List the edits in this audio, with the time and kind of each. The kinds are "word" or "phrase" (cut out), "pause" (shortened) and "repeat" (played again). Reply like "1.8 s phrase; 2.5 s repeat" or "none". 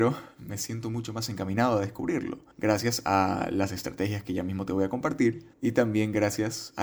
2.5 s pause; 5.5 s pause